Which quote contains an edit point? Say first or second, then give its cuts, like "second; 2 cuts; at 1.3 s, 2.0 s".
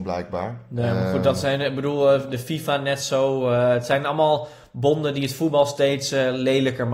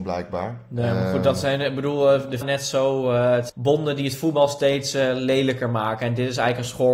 second; 2 cuts; at 2.4 s, 3.5 s